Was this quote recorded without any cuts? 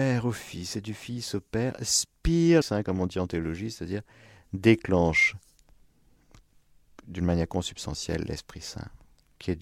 no; 1 cut; at 2.6 s

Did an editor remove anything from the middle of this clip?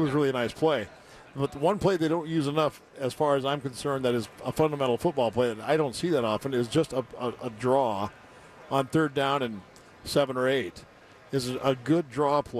no; 0 cuts

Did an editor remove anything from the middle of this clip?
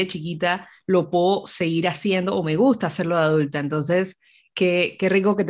no; 0 cuts

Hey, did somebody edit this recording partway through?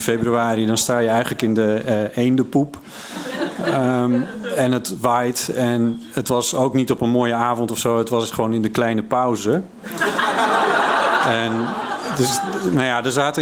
no; 0 cuts

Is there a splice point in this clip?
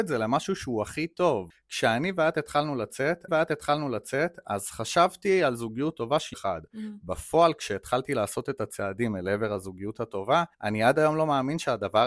yes; 3 cuts; at 3.3 s, 6.3 s, 10.5 s

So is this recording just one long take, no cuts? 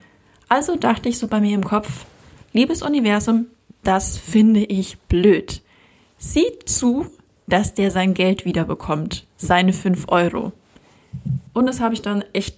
no; 1 cut; at 11.5 s

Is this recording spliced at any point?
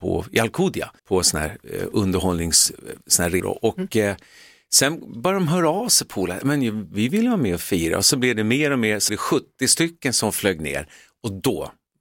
yes; 3 cuts; at 1.0 s, 3.4 s, 9.1 s

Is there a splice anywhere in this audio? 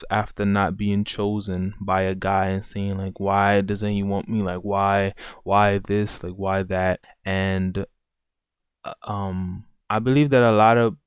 yes; 2 cuts; at 7.0 s, 9.8 s

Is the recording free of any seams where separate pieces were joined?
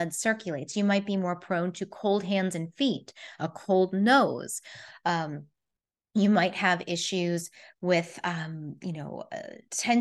yes; 0 cuts

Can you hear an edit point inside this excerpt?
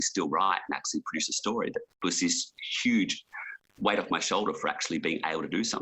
no; 0 cuts

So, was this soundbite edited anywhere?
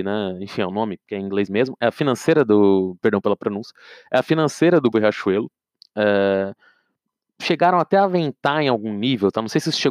yes; 1 cut; at 4.9 s

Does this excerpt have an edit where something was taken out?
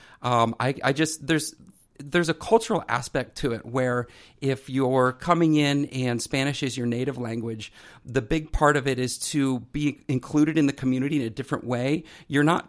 no; 0 cuts

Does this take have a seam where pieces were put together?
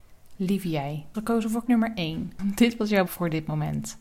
yes; 3 cuts; at 1.1 s, 1.7 s, 3.1 s

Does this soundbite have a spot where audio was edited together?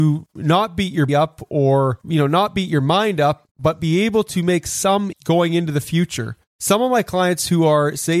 yes; 2 cuts; at 1.1 s, 5.1 s

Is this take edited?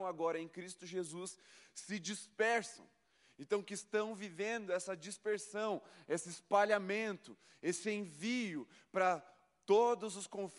no; 0 cuts

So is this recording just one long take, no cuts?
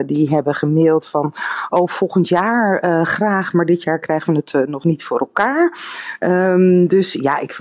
yes; 0 cuts

